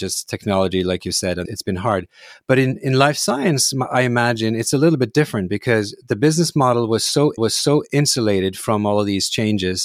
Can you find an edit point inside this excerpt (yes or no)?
yes